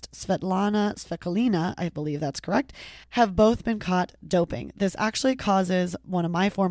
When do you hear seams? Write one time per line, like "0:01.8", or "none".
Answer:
0:03.0